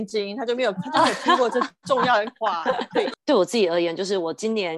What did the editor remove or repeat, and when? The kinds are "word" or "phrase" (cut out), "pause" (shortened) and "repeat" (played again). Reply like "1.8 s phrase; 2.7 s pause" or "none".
none

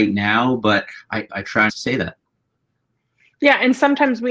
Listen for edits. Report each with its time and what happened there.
1.3 s word; 1.7 s word

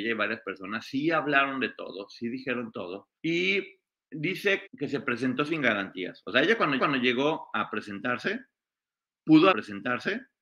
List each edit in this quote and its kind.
3.2 s pause; 4.7 s word; 6.8 s repeat; 9.5 s repeat

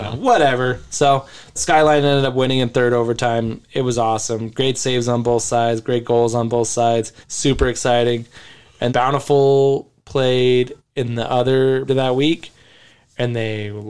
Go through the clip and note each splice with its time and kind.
1.6 s word; 7.2 s pause; 8.9 s word; 10.8 s pause; 11.9 s phrase

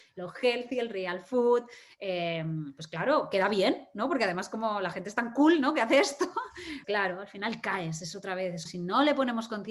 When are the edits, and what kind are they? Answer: 6.8 s word; 8.7 s word

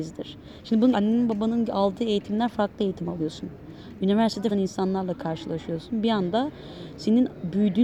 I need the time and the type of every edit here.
0.9 s phrase; 4.5 s phrase

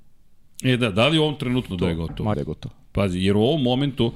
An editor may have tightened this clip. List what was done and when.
1.7 s word; 2.3 s phrase

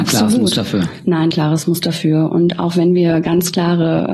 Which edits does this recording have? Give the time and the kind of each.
1.3 s phrase

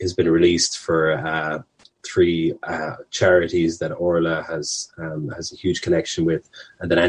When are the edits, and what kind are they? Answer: none

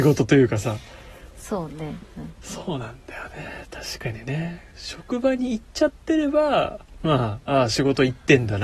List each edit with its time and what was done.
4.7 s pause

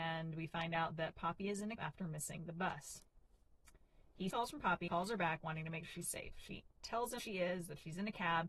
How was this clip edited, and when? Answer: 1.8 s word; 4.3 s phrase; 4.9 s word; 5.9 s word; 7.2 s word

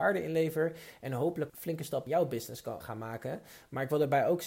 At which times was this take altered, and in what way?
1.5 s phrase; 2.1 s word; 2.8 s word

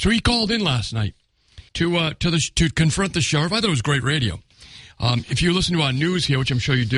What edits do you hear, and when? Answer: 1.7 s pause

